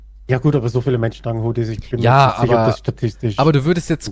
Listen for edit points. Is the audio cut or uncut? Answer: uncut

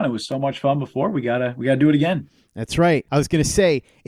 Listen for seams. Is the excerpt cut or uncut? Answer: uncut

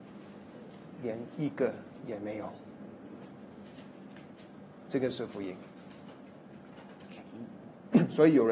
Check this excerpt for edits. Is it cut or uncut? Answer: cut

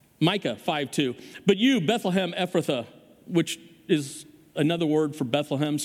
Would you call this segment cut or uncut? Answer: uncut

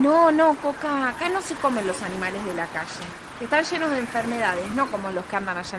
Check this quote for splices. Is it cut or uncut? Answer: uncut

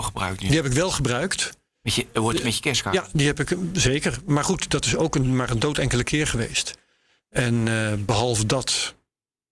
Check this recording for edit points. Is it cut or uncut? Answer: uncut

